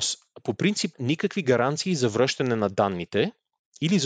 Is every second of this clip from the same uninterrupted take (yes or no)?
no